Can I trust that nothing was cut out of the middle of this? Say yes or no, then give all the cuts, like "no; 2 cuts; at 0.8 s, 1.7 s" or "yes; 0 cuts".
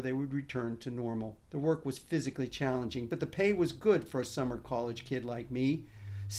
no; 1 cut; at 1.4 s